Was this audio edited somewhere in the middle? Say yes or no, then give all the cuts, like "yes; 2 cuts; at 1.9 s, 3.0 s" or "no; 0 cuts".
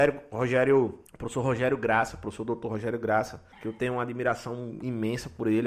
yes; 2 cuts; at 1.1 s, 3.5 s